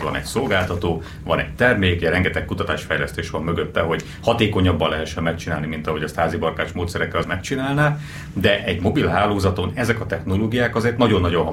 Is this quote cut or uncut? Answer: cut